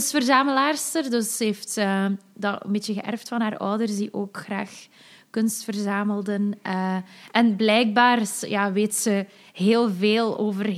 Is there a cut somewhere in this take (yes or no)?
no